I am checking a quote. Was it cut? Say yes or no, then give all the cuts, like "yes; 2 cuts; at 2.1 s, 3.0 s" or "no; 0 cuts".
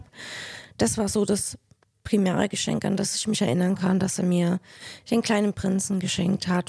no; 0 cuts